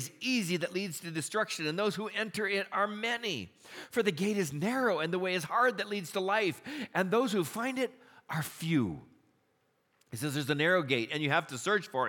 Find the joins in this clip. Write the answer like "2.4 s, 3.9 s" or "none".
none